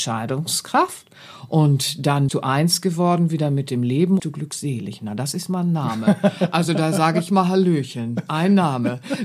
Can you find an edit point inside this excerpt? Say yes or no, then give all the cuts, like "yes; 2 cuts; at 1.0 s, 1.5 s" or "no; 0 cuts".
yes; 2 cuts; at 2.3 s, 4.2 s